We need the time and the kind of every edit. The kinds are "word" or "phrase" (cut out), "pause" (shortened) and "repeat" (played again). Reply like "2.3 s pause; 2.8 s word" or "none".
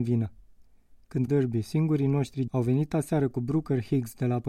1.3 s phrase; 2.5 s word